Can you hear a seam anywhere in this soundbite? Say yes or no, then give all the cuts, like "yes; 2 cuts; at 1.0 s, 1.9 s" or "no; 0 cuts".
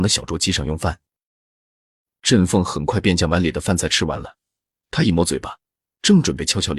no; 0 cuts